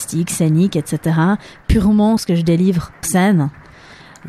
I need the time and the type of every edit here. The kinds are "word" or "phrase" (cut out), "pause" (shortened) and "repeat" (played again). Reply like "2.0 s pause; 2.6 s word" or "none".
2.2 s word; 3.0 s word